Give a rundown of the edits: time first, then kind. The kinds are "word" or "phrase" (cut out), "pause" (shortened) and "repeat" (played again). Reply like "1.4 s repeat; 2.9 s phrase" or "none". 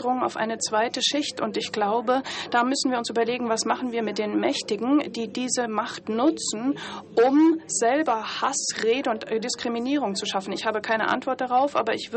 none

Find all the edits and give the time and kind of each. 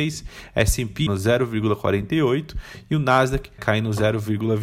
1.1 s word; 3.6 s word

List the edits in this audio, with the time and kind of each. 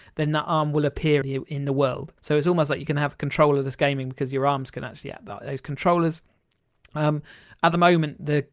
1.2 s phrase; 2.2 s pause

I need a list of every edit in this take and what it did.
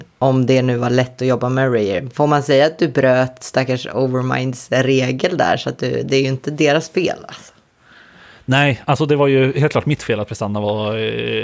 none

